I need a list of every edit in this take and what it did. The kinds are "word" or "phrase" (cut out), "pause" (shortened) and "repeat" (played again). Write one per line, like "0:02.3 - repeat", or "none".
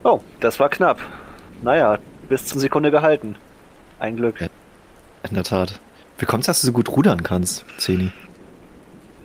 0:02.5 - word